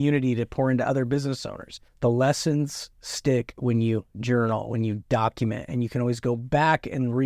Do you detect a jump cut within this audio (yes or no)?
yes